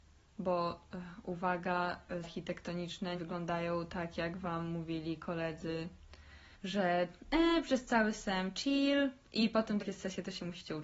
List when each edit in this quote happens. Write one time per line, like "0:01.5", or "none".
0:02.2
0:03.1
0:06.5
0:09.8